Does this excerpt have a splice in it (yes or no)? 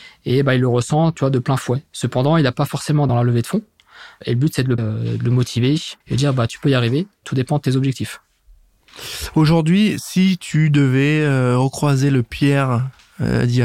yes